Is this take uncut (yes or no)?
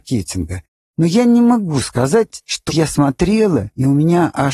no